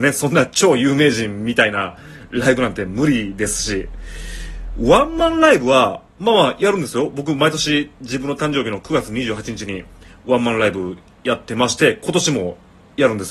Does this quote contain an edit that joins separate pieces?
no; 0 cuts

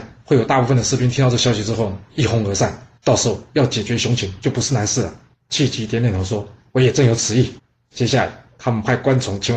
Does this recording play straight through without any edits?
no; 3 cuts; at 3.0 s, 5.3 s, 7.6 s

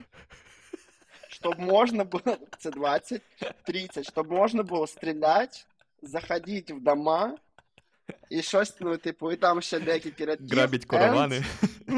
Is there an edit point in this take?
no; 0 cuts

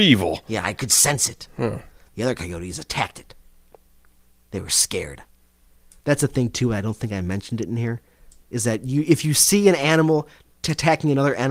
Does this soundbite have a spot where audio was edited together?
no; 0 cuts

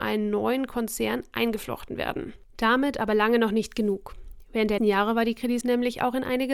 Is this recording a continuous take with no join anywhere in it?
no; 2 cuts; at 4.8 s, 5.6 s

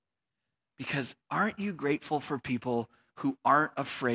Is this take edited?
yes; 1 cut; at 1.2 s

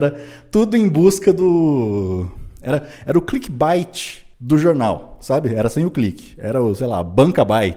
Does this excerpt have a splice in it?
yes; 1 cut; at 4.3 s

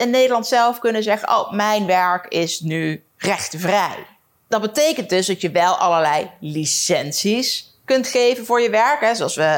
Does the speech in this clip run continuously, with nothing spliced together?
yes; 0 cuts

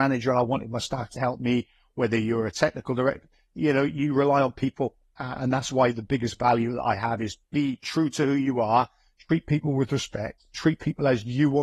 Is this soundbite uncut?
yes; 0 cuts

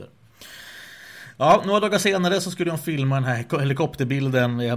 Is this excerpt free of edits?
yes; 0 cuts

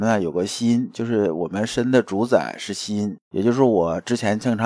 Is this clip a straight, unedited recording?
no; 1 cut; at 3.2 s

